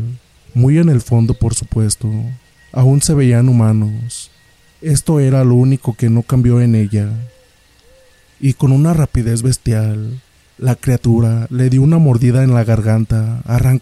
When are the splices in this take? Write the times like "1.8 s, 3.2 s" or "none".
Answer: none